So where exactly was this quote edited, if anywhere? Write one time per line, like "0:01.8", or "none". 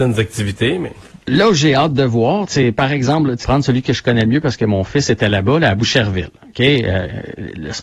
0:01.2
0:02.5
0:03.4